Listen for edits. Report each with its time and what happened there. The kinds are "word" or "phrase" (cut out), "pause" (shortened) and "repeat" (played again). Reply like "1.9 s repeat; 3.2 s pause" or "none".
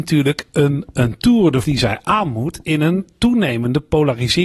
1.6 s word